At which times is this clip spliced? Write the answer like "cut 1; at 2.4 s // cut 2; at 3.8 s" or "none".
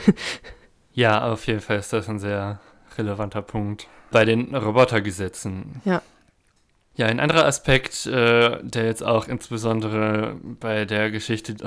none